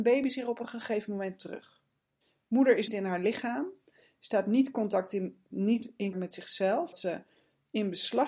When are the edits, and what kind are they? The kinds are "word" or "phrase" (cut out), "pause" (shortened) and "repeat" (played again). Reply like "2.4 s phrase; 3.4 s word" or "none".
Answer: 2.9 s word; 5.5 s word; 6.1 s word; 6.9 s word